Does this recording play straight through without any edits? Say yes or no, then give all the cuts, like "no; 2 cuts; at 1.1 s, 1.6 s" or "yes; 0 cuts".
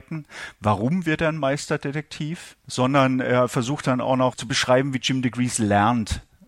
yes; 0 cuts